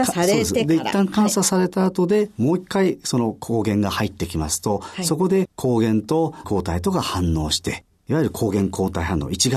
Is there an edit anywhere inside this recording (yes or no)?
yes